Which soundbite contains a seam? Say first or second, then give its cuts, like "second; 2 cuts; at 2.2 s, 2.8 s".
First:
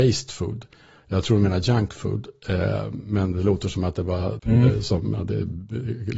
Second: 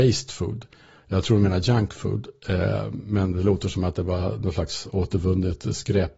first; 1 cut; at 4.4 s